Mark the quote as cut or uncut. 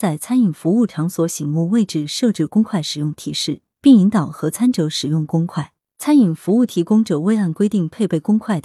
uncut